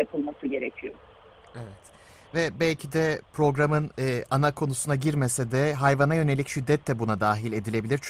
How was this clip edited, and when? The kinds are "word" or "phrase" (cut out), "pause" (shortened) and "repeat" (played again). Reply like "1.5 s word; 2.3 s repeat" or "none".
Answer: none